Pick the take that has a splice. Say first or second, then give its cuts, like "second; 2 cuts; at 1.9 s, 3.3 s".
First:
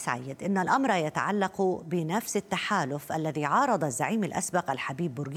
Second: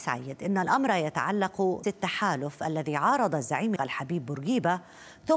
second; 2 cuts; at 1.8 s, 3.8 s